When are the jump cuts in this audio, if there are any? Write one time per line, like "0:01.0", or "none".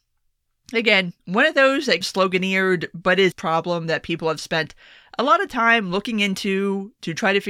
0:01.2
0:02.0
0:03.3